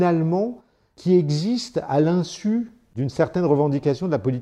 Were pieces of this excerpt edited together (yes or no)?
no